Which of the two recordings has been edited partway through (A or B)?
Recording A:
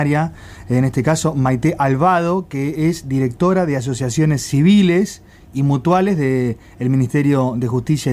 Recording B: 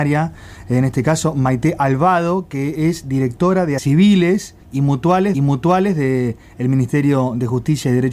B